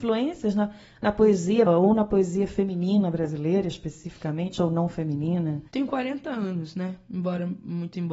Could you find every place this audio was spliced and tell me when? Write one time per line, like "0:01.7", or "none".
0:01.7
0:05.7